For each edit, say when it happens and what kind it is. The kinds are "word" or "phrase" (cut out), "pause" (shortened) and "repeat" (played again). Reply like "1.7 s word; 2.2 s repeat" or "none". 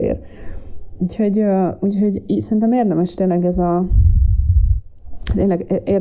none